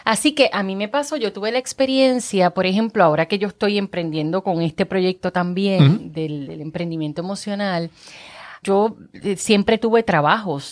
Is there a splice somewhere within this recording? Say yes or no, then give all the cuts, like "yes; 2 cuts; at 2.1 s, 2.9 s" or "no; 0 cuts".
yes; 1 cut; at 8.6 s